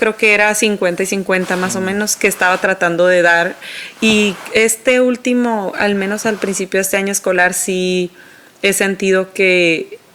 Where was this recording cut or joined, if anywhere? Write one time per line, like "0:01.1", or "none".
none